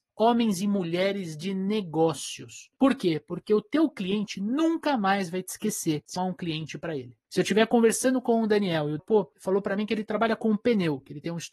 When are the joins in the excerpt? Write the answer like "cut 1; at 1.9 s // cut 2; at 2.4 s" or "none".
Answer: cut 1; at 6.2 s // cut 2; at 9.0 s